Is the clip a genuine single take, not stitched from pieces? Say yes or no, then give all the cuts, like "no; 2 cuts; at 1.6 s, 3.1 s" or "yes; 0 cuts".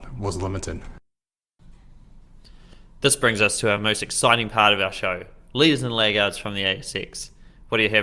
yes; 0 cuts